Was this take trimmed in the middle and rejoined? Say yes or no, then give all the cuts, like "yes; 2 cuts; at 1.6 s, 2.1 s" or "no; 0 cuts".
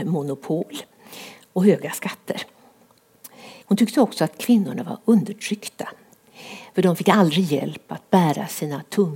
yes; 1 cut; at 3.6 s